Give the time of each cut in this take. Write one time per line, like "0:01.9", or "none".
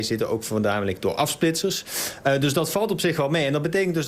none